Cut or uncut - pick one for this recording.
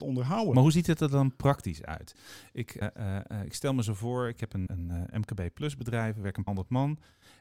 cut